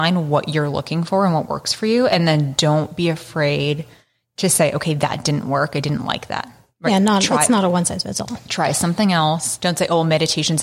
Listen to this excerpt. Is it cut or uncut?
uncut